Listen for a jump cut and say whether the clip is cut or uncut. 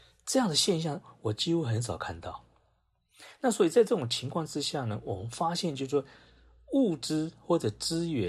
uncut